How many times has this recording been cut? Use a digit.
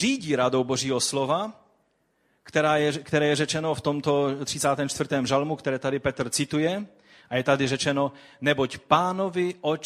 0